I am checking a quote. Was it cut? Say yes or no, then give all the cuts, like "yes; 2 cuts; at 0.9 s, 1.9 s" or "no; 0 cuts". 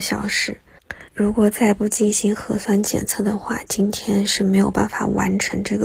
yes; 1 cut; at 1.1 s